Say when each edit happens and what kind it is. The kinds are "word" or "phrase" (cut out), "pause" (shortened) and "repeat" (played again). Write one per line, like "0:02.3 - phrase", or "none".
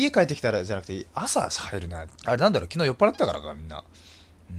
0:02.2 - pause